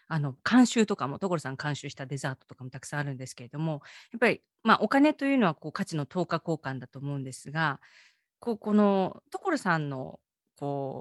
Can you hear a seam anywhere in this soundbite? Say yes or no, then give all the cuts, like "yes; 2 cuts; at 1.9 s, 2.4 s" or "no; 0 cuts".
no; 0 cuts